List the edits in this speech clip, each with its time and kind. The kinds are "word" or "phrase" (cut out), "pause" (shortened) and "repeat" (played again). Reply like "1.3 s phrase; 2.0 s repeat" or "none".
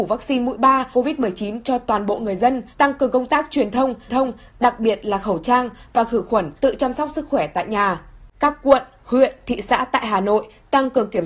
0.9 s word; 2.7 s pause; 4.1 s repeat; 6.6 s pause